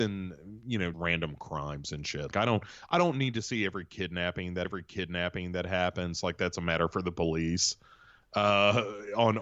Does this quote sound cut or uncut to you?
cut